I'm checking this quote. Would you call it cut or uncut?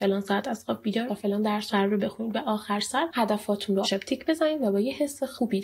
cut